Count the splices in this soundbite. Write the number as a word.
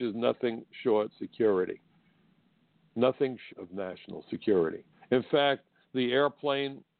three